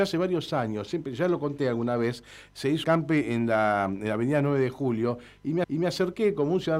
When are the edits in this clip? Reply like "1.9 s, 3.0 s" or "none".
2.8 s, 5.6 s